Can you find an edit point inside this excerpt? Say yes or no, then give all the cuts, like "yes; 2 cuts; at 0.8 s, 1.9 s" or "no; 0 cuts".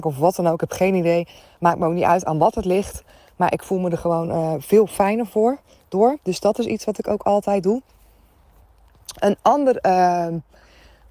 no; 0 cuts